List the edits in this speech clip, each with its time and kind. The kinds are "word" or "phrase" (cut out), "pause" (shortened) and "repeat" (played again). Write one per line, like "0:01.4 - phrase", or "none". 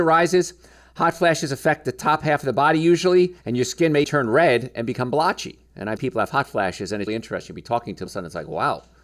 0:03.4 - pause
0:04.0 - word
0:06.0 - word
0:07.1 - word
0:08.1 - phrase